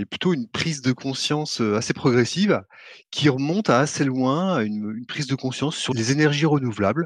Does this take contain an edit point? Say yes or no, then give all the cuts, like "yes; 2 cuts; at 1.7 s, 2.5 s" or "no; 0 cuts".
no; 0 cuts